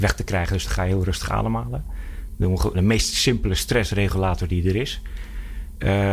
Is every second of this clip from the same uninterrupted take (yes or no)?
no